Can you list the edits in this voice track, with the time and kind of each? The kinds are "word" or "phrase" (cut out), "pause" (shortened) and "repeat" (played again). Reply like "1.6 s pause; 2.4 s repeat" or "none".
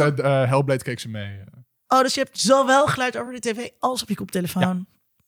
none